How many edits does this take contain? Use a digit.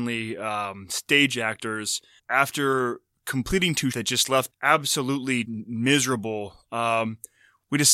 4